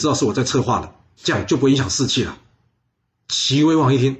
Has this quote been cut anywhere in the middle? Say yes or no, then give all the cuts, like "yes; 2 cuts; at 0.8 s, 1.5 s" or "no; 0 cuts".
no; 0 cuts